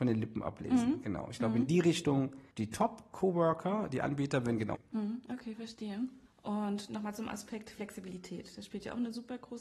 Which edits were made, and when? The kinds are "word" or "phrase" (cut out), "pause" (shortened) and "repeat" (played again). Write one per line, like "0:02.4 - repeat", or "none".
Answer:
0:02.5 - pause
0:04.7 - phrase
0:06.3 - pause